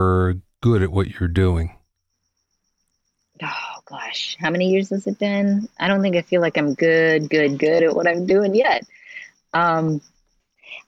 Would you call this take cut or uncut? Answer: uncut